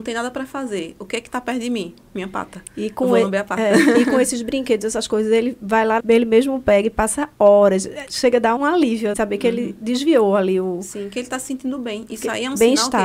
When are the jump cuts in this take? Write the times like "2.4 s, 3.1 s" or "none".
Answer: 6.0 s, 8.6 s, 9.1 s